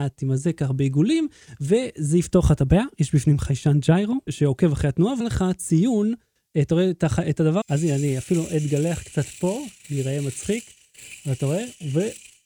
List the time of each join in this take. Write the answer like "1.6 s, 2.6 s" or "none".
4.3 s, 5.2 s, 7.6 s